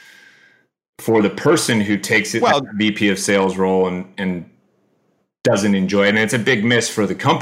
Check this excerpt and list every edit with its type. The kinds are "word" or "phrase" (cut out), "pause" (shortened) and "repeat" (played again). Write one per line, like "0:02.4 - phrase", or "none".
none